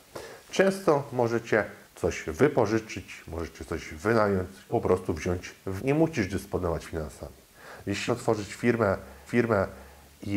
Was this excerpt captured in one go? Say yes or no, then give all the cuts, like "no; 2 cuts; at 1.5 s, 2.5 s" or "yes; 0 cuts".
no; 6 cuts; at 1.8 s, 4.7 s, 5.8 s, 6.8 s, 8.1 s, 9.3 s